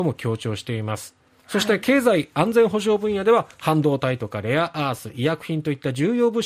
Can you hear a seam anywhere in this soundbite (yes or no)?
no